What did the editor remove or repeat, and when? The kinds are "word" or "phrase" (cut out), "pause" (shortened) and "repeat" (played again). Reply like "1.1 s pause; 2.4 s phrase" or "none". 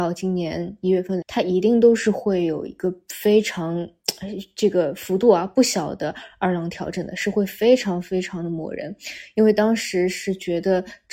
1.2 s phrase